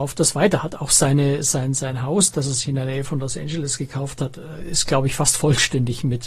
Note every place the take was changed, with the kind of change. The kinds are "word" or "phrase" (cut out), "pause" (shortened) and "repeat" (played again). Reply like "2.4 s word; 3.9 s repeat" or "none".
none